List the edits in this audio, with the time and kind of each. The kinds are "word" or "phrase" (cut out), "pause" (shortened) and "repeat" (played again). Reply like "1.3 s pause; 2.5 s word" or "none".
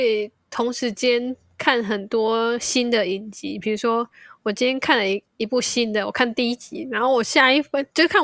none